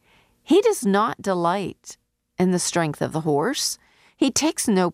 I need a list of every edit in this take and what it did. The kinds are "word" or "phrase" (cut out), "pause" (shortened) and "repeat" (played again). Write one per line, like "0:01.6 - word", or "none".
none